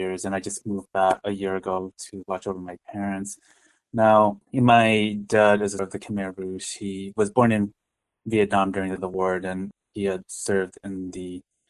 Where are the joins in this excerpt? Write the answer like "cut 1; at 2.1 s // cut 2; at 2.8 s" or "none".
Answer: cut 1; at 1.2 s // cut 2; at 4.4 s // cut 3; at 5.8 s // cut 4; at 9.0 s